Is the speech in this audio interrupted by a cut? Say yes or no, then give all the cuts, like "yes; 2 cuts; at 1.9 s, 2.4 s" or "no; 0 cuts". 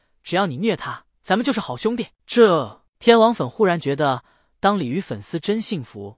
yes; 1 cut; at 1.1 s